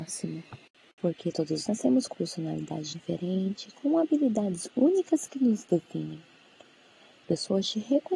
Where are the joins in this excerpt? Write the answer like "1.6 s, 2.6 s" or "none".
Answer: 1.7 s, 2.1 s, 2.9 s, 7.2 s

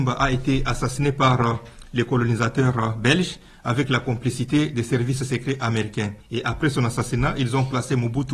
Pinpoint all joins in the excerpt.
6.2 s

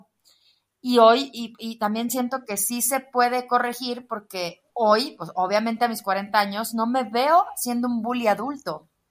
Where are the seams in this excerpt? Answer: 4.7 s

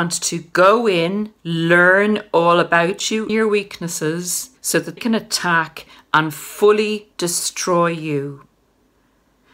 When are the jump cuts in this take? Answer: 1.4 s, 3.3 s, 4.6 s, 5.0 s, 7.1 s

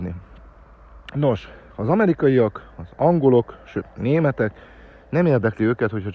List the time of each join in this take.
none

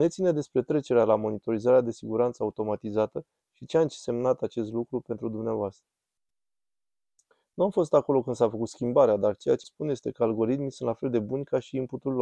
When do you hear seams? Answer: 9.6 s

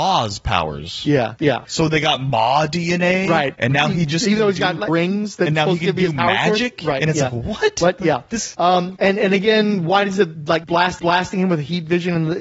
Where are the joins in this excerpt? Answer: 4.9 s, 11.0 s

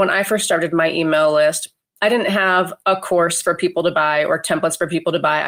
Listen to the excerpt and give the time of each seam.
none

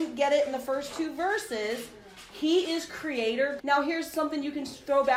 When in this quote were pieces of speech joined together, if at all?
3.6 s

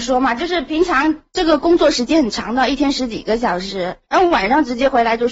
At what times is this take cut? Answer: 4.1 s

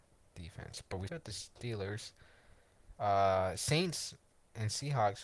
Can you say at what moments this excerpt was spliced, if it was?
1.1 s, 2.9 s, 4.2 s

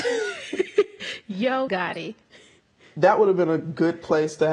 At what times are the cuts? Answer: 1.7 s

